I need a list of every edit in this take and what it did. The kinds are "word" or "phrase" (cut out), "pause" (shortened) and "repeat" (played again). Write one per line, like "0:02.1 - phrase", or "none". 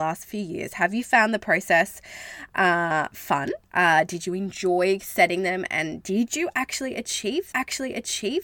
0:03.6 - pause
0:07.5 - repeat